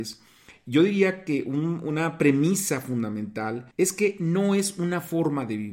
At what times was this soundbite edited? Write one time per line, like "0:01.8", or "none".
0:03.7